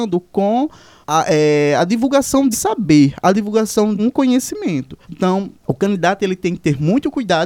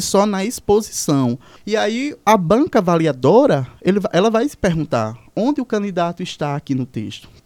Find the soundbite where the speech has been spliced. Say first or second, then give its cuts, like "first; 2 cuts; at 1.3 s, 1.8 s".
first; 3 cuts; at 2.5 s, 4.0 s, 5.0 s